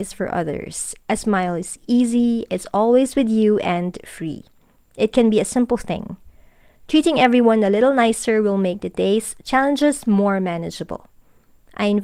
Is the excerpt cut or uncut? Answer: uncut